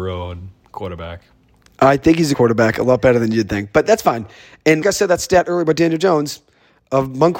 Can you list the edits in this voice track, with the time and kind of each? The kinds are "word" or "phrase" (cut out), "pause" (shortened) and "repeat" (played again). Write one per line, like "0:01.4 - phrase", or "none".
0:02.3 - word
0:04.8 - word